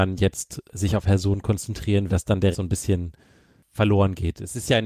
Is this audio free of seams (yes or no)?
no